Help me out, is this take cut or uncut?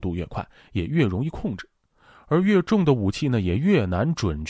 uncut